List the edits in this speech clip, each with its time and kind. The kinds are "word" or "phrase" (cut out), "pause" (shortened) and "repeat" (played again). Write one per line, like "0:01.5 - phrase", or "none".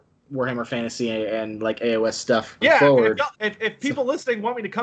0:02.6 - word
0:03.3 - pause